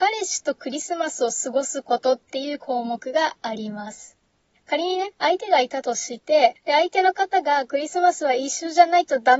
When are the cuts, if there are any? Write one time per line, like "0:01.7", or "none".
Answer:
none